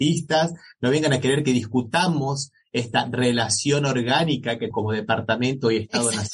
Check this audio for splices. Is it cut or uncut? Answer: cut